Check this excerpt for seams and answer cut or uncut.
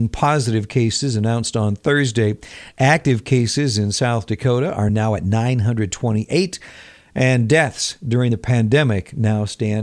uncut